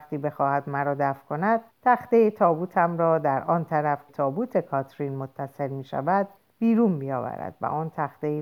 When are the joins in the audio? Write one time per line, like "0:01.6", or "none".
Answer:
0:01.7
0:04.1
0:06.4